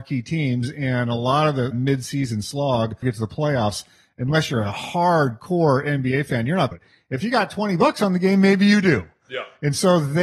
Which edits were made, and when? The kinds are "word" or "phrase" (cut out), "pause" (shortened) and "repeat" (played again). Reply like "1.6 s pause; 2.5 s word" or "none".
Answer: 1.7 s word; 3.0 s word; 6.7 s phrase